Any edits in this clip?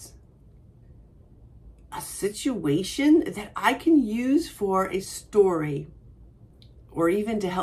no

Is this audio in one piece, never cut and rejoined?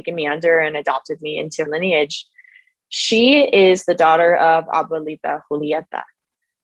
no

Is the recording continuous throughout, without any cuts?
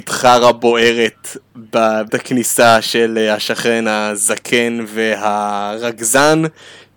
no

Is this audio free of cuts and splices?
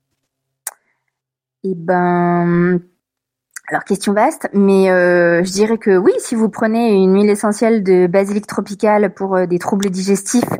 yes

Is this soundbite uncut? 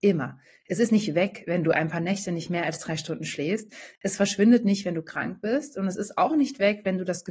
yes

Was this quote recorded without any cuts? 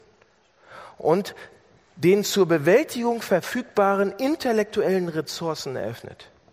yes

